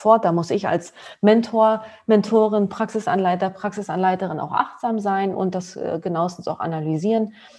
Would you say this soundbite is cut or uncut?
uncut